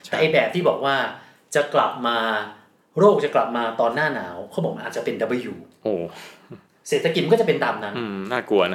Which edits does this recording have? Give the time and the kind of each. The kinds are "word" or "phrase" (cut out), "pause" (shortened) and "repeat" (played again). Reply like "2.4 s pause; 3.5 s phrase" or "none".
none

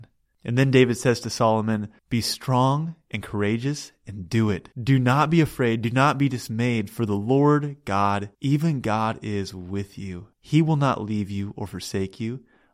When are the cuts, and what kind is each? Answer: 2.0 s pause; 4.7 s pause; 8.3 s pause; 10.3 s pause

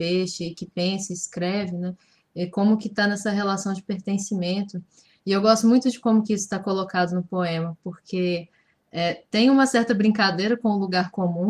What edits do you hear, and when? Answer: none

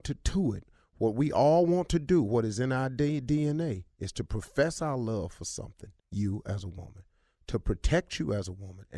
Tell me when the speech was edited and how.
6.0 s pause

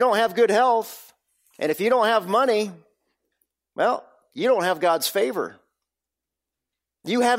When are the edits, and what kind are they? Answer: none

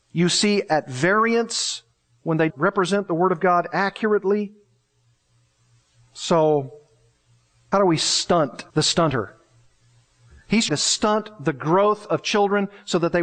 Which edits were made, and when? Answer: 2.5 s word; 7.7 s word; 8.7 s pause; 10.7 s word

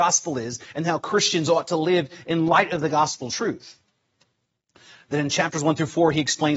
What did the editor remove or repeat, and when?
none

